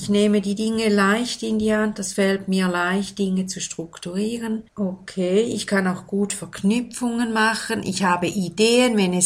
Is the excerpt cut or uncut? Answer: cut